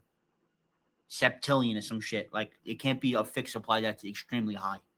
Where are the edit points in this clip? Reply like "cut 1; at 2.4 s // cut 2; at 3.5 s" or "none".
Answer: none